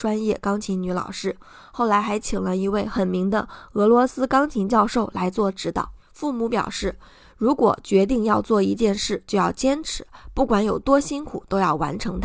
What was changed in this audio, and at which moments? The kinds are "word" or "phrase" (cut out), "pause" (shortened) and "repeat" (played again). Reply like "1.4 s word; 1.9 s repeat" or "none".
none